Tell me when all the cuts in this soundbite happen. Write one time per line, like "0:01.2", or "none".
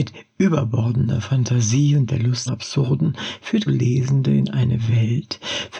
0:02.5
0:03.7